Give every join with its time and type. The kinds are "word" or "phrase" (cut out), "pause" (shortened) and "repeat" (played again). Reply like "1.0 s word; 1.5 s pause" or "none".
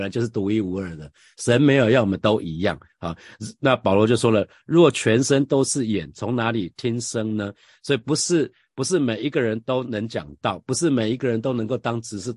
none